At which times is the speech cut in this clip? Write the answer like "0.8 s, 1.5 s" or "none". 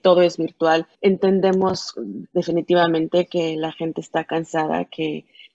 0.9 s